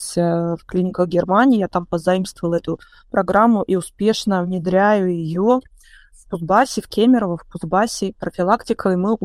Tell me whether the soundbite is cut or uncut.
uncut